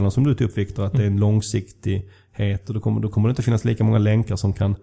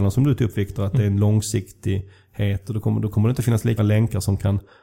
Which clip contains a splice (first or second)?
second